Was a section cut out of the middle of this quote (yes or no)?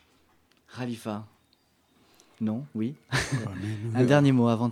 no